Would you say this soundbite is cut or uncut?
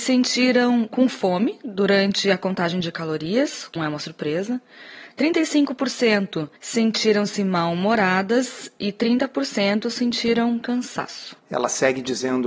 cut